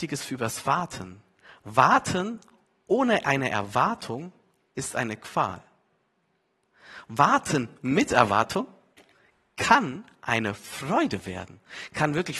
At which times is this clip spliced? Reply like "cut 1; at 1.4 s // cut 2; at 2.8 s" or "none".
none